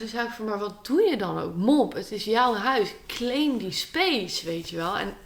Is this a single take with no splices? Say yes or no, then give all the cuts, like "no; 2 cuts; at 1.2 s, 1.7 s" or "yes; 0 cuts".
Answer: yes; 0 cuts